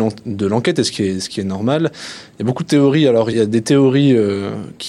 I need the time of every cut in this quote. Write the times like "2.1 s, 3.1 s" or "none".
3.3 s